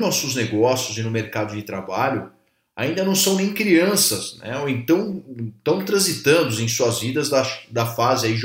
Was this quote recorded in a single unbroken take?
yes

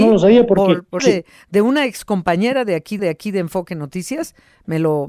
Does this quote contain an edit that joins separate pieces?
yes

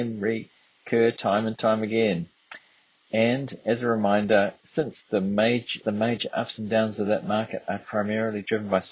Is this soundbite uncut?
no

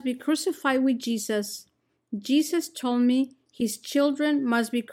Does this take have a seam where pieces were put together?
no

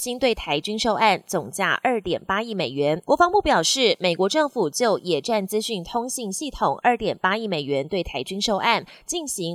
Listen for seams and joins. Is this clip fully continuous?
no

